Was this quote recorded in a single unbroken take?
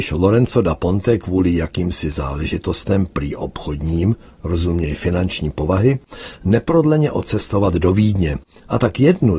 yes; 0 cuts

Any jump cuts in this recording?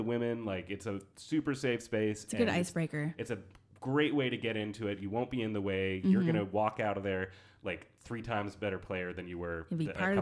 no; 0 cuts

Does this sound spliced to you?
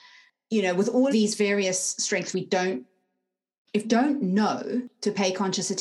yes; 3 cuts; at 1.1 s, 2.3 s, 3.8 s

